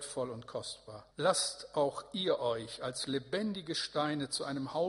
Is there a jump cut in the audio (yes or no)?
yes